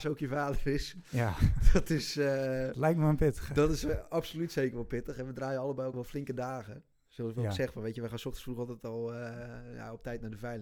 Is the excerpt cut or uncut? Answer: cut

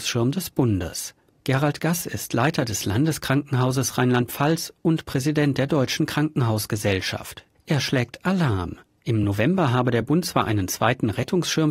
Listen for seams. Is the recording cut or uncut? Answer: uncut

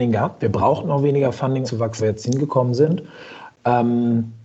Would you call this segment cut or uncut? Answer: cut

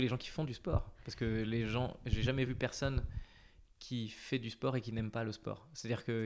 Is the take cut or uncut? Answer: uncut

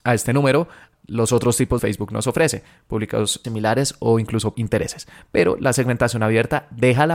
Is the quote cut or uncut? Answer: cut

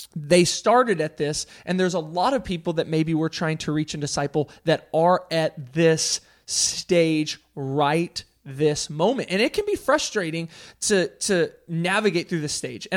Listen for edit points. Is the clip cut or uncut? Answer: uncut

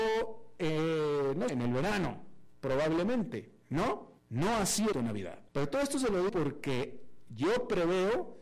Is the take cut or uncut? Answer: cut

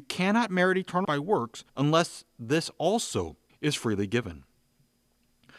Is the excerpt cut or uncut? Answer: cut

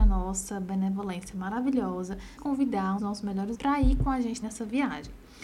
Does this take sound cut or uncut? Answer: cut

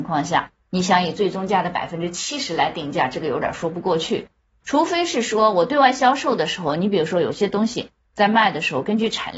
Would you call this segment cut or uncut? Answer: uncut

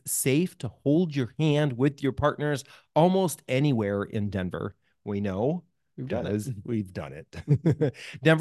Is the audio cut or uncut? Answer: uncut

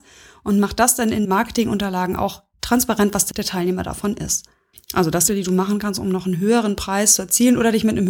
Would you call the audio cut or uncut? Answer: cut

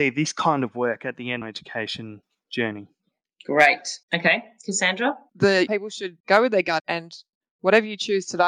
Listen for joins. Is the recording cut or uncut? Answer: cut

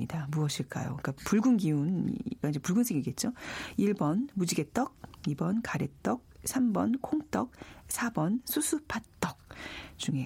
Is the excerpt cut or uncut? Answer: cut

